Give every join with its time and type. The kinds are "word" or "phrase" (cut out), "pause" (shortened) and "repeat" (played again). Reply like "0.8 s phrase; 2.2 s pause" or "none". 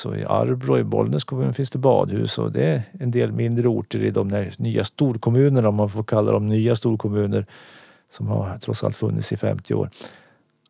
none